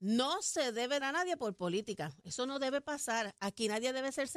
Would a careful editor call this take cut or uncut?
cut